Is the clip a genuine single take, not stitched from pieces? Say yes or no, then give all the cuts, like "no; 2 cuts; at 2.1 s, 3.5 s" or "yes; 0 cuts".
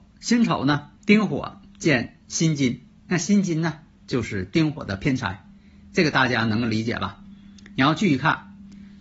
no; 3 cuts; at 1.0 s, 2.2 s, 3.0 s